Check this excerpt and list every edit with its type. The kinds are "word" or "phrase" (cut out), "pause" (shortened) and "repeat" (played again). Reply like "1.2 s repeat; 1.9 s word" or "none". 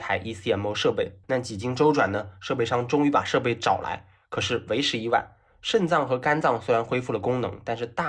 1.2 s pause